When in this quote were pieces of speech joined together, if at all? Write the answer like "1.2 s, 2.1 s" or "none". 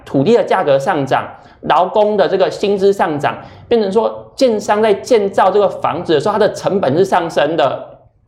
none